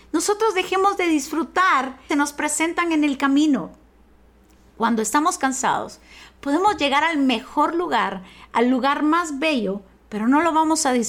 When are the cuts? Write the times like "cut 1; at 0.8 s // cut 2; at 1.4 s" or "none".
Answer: cut 1; at 2.1 s